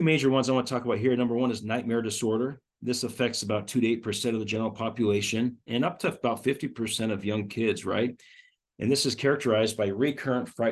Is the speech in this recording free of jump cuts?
yes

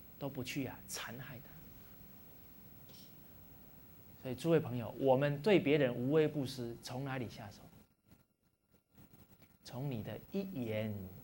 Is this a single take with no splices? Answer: no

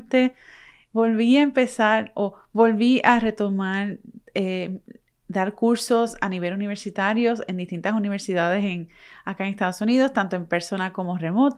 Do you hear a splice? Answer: no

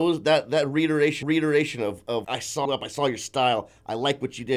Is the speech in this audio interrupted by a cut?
yes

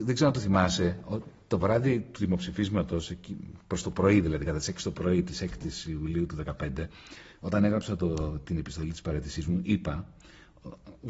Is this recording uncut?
yes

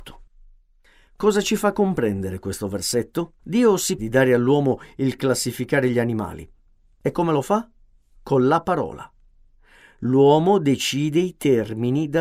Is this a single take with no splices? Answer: no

